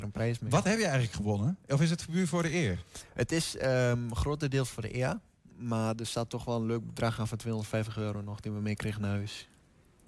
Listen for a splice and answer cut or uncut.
uncut